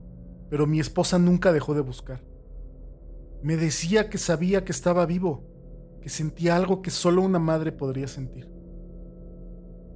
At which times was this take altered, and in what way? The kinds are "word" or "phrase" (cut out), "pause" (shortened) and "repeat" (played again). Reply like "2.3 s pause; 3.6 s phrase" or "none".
none

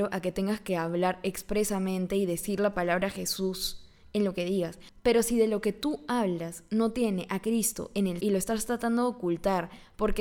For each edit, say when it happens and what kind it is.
8.2 s word

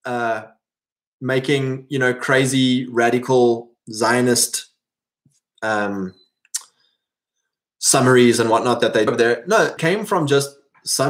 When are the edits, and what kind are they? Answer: 3.8 s word; 9.1 s word; 9.8 s word

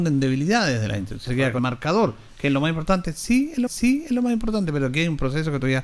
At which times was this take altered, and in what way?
1.3 s word; 1.6 s word; 3.7 s repeat

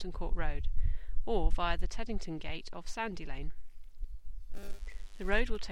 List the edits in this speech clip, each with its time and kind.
none

